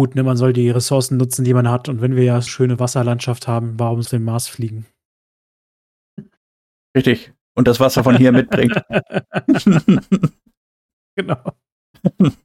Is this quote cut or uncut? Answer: cut